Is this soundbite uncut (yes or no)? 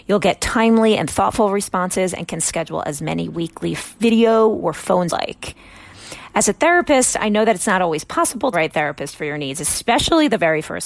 no